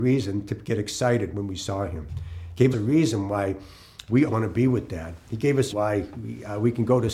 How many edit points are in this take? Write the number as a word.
four